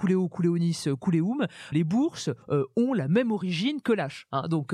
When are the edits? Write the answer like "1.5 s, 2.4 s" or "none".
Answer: 1.7 s